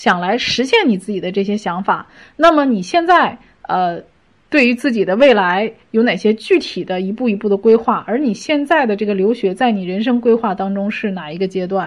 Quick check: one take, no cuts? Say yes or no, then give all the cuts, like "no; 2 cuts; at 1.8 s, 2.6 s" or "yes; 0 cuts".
yes; 0 cuts